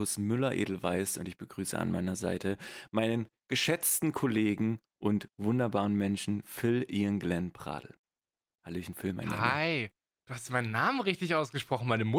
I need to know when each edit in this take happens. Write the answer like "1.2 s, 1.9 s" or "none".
none